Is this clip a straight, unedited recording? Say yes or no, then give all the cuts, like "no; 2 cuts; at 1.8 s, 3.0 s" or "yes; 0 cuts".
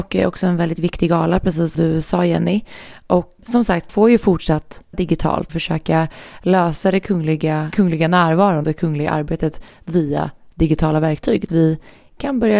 no; 8 cuts; at 1.7 s, 3.4 s, 3.9 s, 4.9 s, 5.5 s, 7.7 s, 8.6 s, 11.5 s